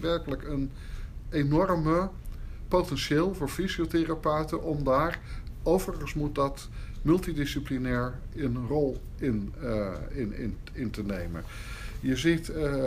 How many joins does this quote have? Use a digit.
0